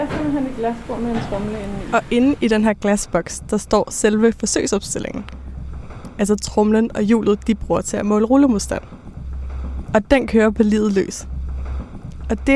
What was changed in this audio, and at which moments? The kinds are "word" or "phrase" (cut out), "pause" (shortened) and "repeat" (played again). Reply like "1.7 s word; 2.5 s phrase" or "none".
none

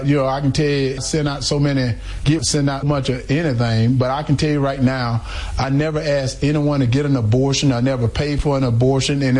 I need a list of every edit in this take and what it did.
1.0 s word; 2.4 s word; 2.8 s word

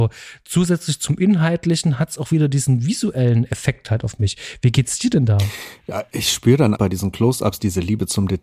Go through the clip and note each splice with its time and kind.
6.8 s word

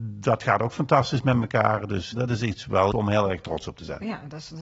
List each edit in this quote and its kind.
2.1 s word; 2.9 s word

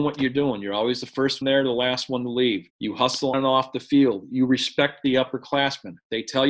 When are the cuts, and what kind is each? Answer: 1.4 s word; 2.7 s pause; 3.3 s word

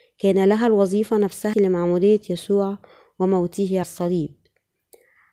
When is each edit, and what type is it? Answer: 1.5 s word; 3.8 s word

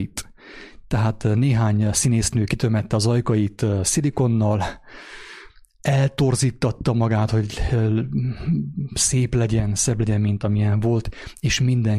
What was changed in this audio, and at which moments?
none

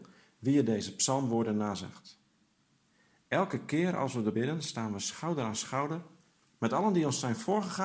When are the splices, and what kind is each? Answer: 4.3 s word

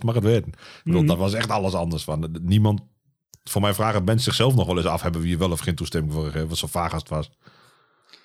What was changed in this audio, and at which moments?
none

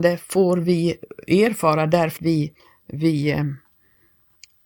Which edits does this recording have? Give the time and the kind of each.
2.2 s word; 2.6 s pause

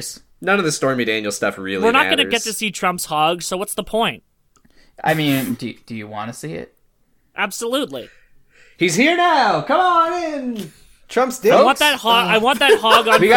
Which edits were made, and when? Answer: none

